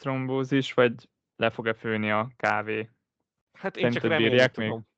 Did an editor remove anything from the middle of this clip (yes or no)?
no